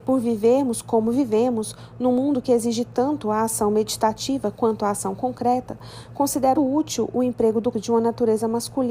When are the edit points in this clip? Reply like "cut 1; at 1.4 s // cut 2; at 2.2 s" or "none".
cut 1; at 6.6 s // cut 2; at 7.7 s